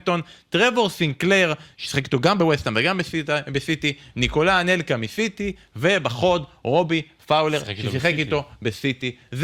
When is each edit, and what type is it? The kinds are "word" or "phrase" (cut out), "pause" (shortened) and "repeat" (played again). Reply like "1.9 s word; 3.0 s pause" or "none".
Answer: none